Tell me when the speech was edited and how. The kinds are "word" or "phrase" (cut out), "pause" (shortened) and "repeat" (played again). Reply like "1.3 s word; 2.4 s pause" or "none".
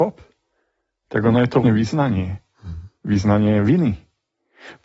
1.6 s word